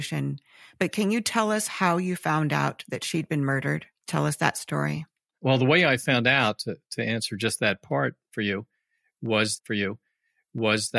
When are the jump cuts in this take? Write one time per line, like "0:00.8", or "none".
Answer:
0:09.6

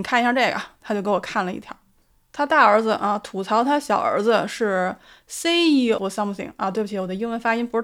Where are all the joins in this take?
0:06.0

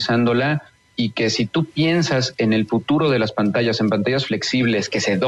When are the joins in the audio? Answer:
none

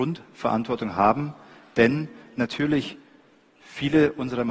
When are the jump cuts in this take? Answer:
none

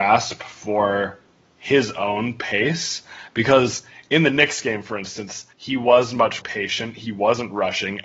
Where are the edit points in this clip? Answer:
0:05.5
0:06.4

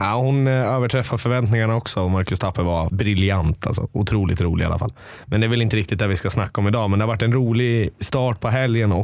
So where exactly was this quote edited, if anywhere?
0:02.9

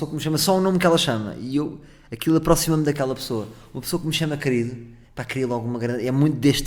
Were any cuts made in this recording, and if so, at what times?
0:05.0

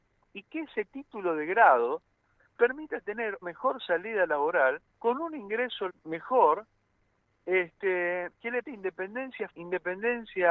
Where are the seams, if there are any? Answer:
0:02.5
0:03.4
0:04.9
0:05.9
0:08.3
0:08.6
0:09.5

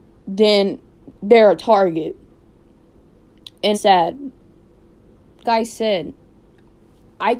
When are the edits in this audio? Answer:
0:03.7
0:05.4

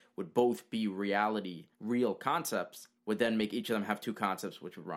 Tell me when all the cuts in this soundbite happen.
0:01.7
0:03.0

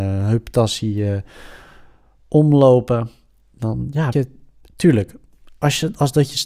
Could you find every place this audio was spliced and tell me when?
0:04.1

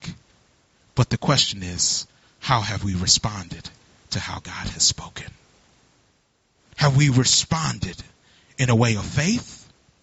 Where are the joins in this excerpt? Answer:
none

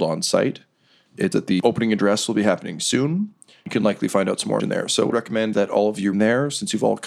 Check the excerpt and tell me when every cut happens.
0:01.3
0:04.6
0:05.1
0:05.5
0:06.1

